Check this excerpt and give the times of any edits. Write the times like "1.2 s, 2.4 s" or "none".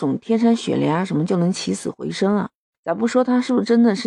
2.7 s